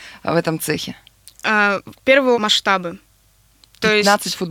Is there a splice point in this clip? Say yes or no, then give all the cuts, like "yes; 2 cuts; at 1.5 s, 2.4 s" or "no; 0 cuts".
yes; 1 cut; at 2.3 s